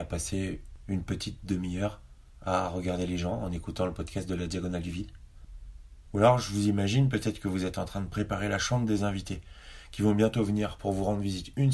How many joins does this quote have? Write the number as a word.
zero